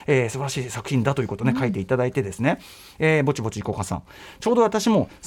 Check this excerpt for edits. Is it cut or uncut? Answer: uncut